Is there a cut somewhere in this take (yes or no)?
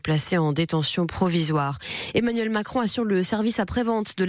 no